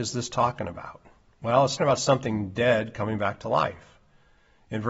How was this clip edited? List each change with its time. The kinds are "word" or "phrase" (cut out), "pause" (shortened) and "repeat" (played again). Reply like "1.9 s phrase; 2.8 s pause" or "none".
1.8 s word